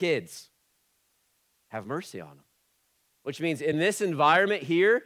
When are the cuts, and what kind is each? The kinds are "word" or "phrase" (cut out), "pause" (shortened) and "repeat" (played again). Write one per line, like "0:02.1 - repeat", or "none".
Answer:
none